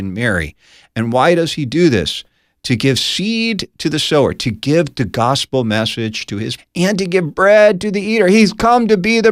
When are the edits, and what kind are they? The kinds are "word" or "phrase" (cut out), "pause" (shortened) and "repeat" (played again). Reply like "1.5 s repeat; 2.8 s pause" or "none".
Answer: 6.6 s word

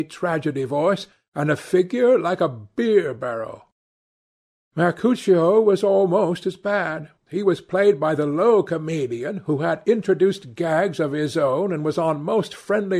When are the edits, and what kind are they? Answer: 7.2 s pause

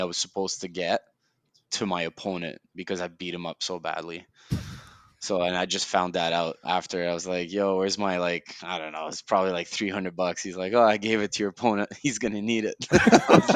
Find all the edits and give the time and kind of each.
none

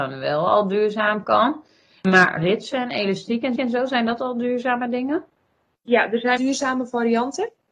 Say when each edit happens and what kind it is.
2.4 s word; 3.6 s repeat; 6.4 s word

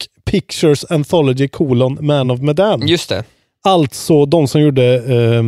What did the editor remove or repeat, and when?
none

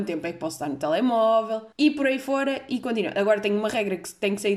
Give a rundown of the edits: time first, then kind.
1.7 s pause

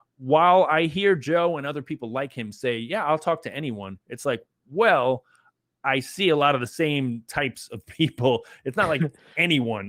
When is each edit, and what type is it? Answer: none

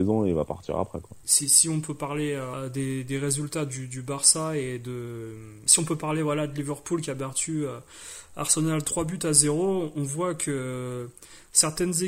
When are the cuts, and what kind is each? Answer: none

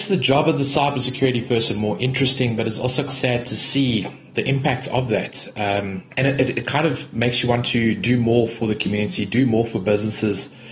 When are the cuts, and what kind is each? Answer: 3.1 s word; 6.1 s pause

